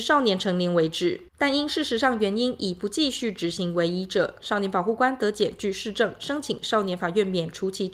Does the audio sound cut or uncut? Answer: cut